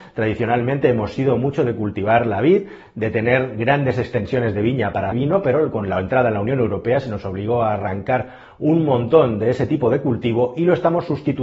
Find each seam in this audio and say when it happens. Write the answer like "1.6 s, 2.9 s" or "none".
5.1 s

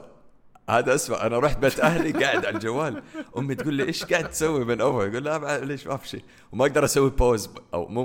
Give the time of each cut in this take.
none

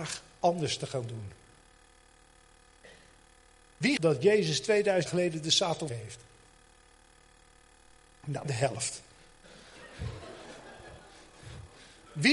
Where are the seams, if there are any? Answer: 4.0 s, 5.1 s, 5.9 s, 8.4 s

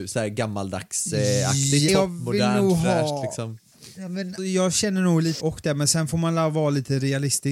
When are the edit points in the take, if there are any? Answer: 1.9 s, 4.4 s, 5.4 s

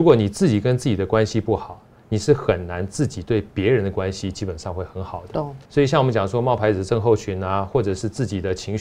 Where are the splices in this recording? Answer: 5.6 s

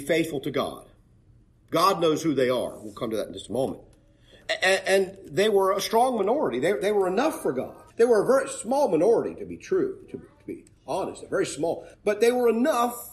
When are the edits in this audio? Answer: 7.9 s, 11.9 s

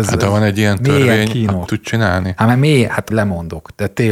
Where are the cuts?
1.7 s, 3.1 s

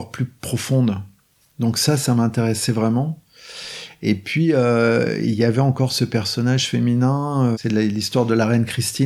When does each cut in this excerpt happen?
7.5 s

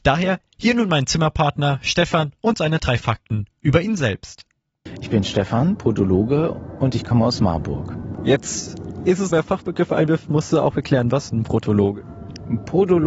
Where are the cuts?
9.3 s, 11.3 s

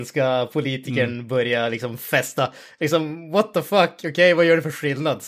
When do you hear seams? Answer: none

